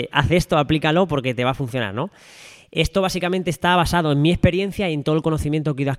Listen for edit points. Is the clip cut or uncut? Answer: uncut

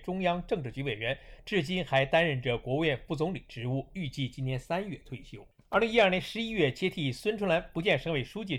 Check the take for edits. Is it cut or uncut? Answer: uncut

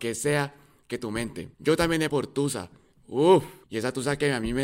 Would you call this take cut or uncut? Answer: cut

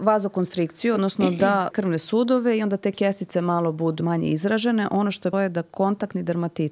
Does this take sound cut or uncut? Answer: cut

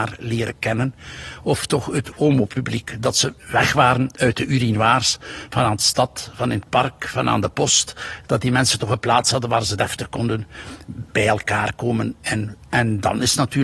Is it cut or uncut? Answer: uncut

